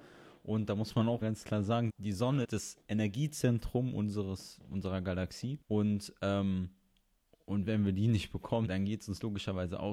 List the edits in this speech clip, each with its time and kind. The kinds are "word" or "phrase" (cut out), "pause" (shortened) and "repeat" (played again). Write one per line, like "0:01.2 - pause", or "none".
0:01.2 - word
0:01.9 - word
0:02.4 - word
0:02.8 - pause
0:05.6 - pause
0:07.3 - pause
0:08.7 - word